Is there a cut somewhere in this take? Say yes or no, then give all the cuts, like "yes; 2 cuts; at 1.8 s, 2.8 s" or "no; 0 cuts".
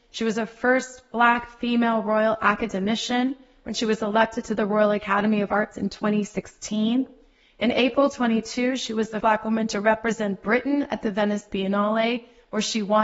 yes; 1 cut; at 9.2 s